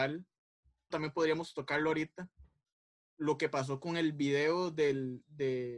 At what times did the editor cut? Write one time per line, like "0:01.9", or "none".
0:00.9